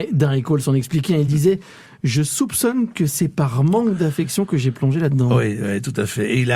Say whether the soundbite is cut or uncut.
uncut